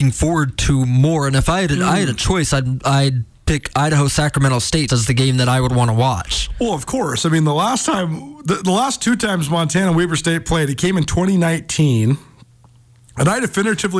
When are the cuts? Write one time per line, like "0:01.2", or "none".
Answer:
0:04.9